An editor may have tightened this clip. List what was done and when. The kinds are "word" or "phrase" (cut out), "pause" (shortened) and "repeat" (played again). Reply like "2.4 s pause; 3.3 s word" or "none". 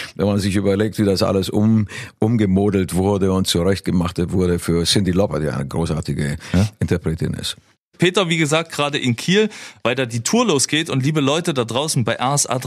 none